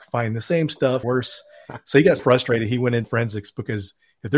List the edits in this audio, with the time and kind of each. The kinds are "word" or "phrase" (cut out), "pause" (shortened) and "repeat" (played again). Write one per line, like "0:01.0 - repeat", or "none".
0:01.0 - word
0:02.2 - word
0:03.0 - word